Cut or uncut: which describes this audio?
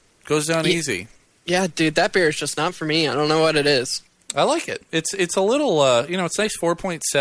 uncut